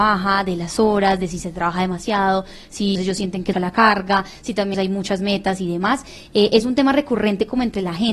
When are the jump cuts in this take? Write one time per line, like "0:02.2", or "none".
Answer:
0:02.9
0:03.5
0:04.7